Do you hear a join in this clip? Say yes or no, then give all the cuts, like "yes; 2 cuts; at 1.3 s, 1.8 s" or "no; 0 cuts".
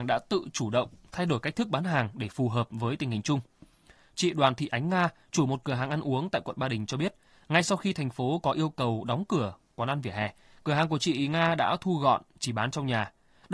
no; 0 cuts